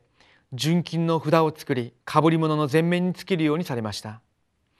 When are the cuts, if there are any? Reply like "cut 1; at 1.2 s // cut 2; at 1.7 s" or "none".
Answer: cut 1; at 2.0 s